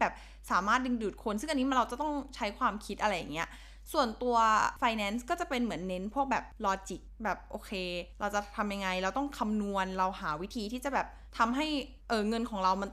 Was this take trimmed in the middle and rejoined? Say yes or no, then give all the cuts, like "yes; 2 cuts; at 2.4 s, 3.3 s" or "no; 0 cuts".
no; 0 cuts